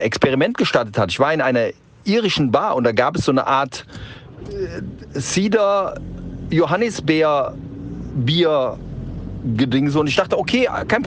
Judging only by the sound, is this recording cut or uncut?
uncut